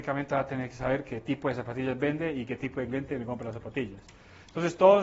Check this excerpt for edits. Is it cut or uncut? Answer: uncut